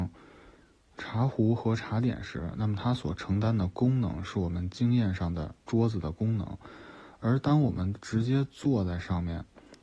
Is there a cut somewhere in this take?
yes; 1 cut; at 5.6 s

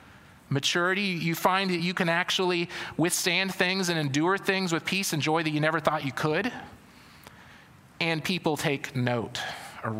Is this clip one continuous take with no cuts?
yes; 0 cuts

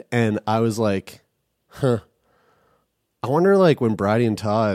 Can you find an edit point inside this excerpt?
no; 0 cuts

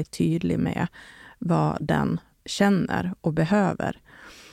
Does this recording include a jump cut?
no; 0 cuts

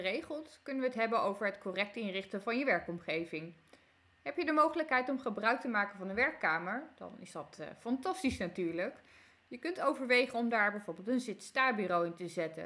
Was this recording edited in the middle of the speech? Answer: no; 0 cuts

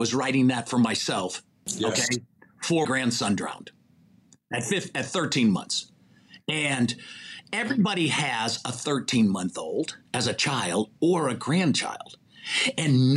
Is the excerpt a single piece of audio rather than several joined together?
no; 2 cuts; at 2.8 s, 10.1 s

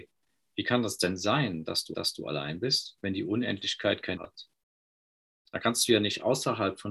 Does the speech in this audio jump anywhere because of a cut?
yes; 2 cuts; at 1.9 s, 4.2 s

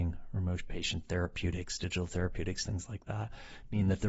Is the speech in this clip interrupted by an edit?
no; 0 cuts

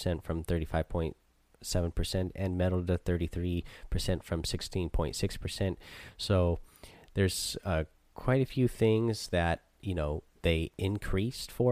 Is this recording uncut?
yes; 0 cuts

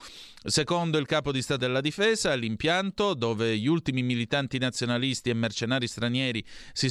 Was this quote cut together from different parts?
yes; 1 cut; at 1.6 s

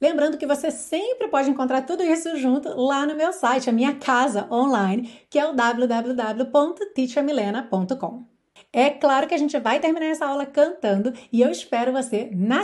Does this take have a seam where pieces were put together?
no; 0 cuts

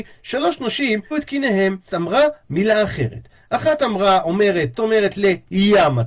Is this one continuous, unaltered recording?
no; 3 cuts; at 1.1 s, 1.9 s, 4.7 s

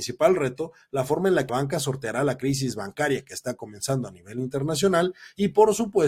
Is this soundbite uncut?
no; 1 cut; at 1.5 s

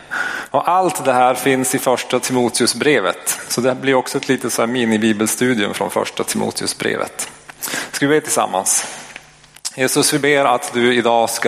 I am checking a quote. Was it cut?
no; 0 cuts

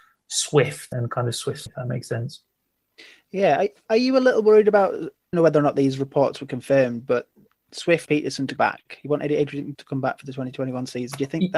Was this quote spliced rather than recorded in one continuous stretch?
yes; 6 cuts; at 0.9 s, 1.7 s, 5.3 s, 8.1 s, 8.6 s, 9.7 s

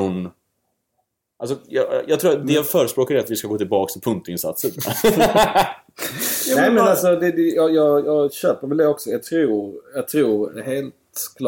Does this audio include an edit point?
no; 0 cuts

